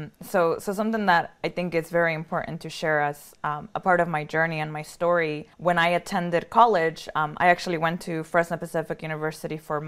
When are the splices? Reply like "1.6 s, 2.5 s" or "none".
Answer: 5.5 s